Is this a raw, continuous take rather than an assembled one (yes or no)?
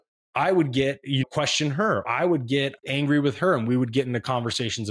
no